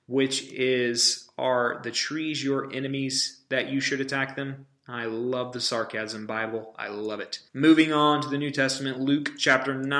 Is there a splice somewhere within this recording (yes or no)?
yes